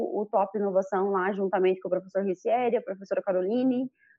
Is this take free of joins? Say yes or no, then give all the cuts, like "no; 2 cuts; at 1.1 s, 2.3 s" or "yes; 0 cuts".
yes; 0 cuts